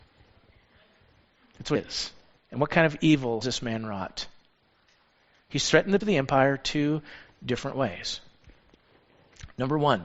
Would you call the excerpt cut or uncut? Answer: cut